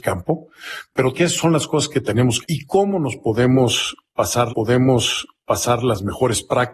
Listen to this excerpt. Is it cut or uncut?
cut